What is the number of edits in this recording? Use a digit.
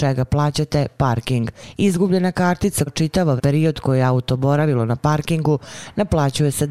2